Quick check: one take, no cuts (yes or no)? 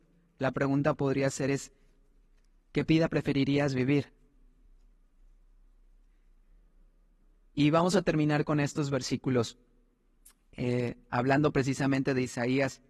yes